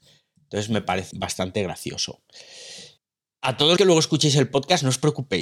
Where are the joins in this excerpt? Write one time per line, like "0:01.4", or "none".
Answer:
0:01.1
0:03.0
0:03.8